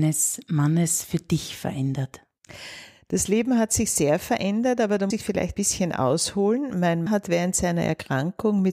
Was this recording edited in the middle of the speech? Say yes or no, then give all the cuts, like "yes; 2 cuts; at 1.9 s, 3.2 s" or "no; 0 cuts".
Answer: yes; 3 cuts; at 5.1 s, 5.5 s, 7.1 s